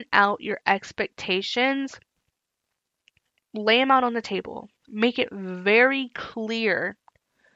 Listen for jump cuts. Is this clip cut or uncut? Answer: cut